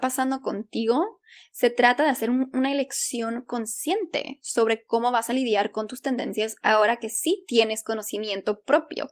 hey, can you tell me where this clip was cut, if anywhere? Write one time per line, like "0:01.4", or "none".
none